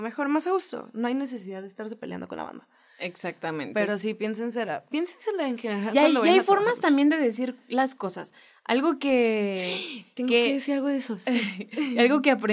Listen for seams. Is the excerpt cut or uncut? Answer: uncut